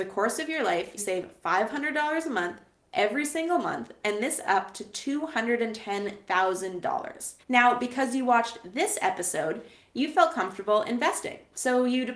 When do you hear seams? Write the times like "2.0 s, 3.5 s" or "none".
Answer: 1.0 s, 4.4 s, 7.4 s